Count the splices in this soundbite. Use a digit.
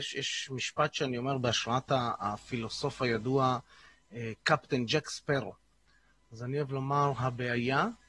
0